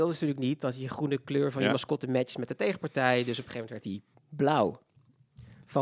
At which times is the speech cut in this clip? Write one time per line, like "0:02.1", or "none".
none

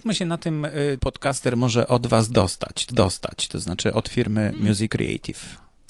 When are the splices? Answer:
0:01.0
0:02.9
0:04.9

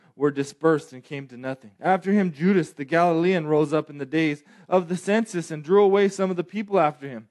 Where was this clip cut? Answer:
0:01.8

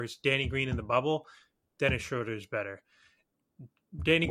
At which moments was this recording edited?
none

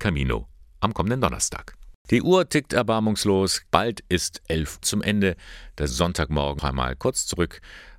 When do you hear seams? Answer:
0:02.0
0:04.8
0:05.9
0:06.6

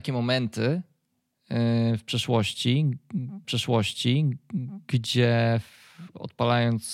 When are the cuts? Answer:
0:03.4

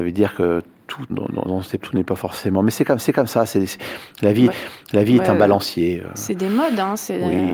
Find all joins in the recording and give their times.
0:01.1
0:01.4
0:01.8
0:03.0
0:04.5

